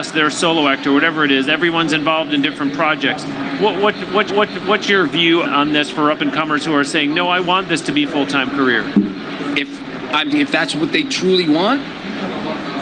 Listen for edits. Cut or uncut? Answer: cut